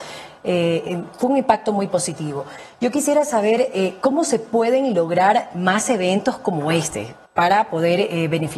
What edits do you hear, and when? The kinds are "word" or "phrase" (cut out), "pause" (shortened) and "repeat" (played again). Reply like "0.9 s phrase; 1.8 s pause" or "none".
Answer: 7.3 s pause